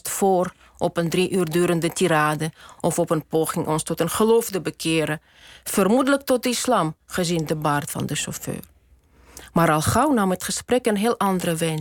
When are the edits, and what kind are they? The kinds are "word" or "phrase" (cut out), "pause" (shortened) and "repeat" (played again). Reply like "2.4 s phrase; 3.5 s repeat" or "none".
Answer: none